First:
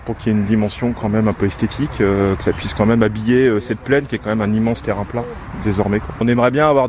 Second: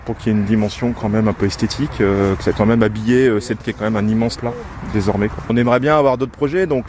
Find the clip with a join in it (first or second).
second